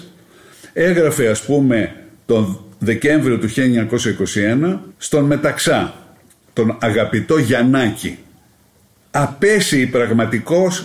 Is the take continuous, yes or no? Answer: yes